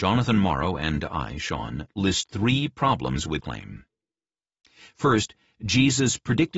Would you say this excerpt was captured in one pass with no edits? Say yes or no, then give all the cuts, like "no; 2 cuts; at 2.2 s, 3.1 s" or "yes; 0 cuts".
no; 1 cut; at 3.4 s